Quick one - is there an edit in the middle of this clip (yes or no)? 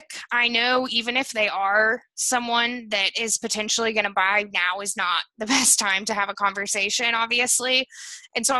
no